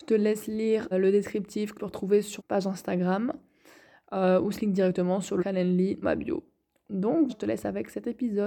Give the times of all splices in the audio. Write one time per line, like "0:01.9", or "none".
0:00.9
0:01.7
0:02.4
0:04.5
0:05.4
0:06.0
0:07.3